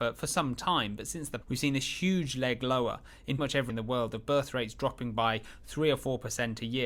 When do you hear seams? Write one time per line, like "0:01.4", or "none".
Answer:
0:01.4
0:03.4
0:03.7